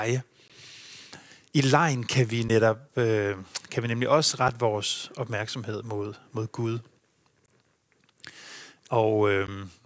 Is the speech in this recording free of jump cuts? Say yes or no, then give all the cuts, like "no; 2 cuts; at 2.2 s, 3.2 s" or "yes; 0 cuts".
yes; 0 cuts